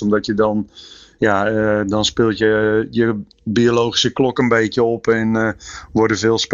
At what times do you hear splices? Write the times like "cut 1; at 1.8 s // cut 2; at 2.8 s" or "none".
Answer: none